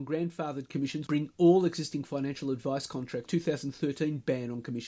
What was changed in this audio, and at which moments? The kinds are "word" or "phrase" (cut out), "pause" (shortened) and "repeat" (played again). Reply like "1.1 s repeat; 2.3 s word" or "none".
1.1 s word; 3.3 s phrase